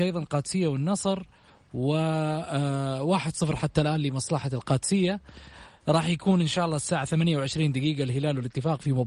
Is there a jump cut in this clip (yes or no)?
no